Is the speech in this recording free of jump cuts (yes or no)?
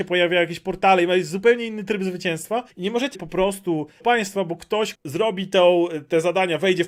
no